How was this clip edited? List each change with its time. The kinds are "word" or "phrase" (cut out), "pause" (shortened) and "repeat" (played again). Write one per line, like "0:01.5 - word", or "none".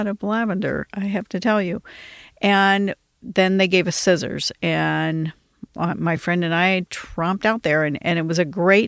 none